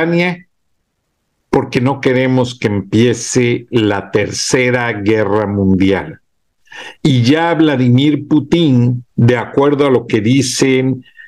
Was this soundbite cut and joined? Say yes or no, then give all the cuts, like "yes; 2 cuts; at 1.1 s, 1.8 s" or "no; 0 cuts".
yes; 2 cuts; at 6.9 s, 9.1 s